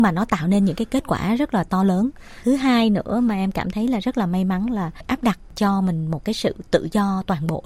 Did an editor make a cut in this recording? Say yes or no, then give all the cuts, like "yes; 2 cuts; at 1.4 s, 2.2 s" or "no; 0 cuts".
yes; 1 cut; at 5.0 s